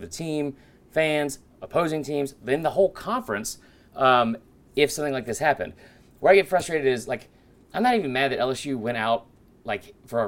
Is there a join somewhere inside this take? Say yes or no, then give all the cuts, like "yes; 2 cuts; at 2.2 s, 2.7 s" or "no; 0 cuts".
no; 0 cuts